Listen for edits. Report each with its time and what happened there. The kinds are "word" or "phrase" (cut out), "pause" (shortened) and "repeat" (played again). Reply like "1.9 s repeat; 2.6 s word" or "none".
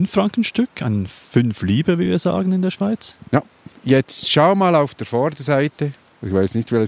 none